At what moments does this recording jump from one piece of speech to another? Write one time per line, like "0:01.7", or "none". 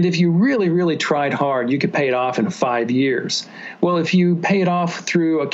none

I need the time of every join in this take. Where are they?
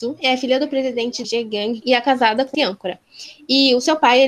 0:01.2
0:01.8
0:02.5

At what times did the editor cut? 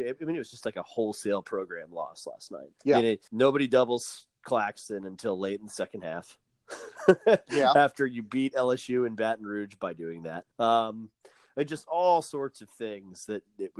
0:02.8
0:03.3
0:10.5

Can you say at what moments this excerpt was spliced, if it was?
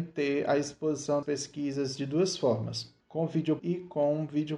0:01.2
0:03.0
0:03.6

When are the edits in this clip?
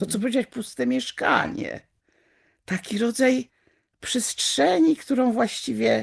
none

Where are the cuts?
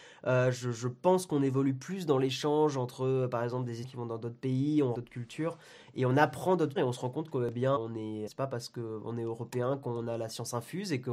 0:03.8
0:04.9
0:06.8
0:07.8
0:08.3

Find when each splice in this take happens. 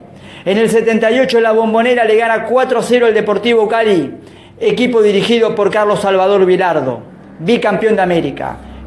none

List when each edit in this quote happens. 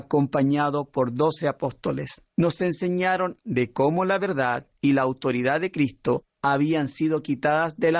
0:02.3
0:03.4

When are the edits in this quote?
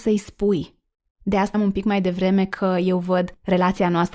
0:01.5

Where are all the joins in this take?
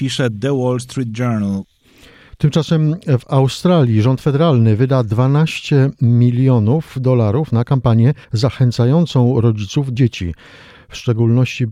0:08.2
0:10.0

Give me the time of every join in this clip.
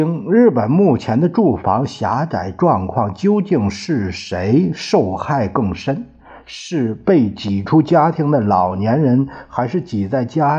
none

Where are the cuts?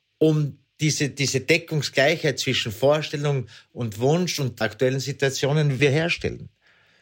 0:04.6
0:05.8

